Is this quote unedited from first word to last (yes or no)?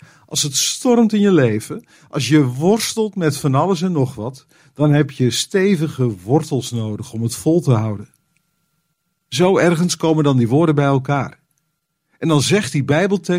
yes